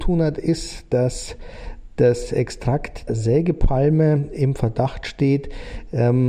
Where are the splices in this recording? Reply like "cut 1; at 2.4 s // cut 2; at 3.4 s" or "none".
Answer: cut 1; at 3.1 s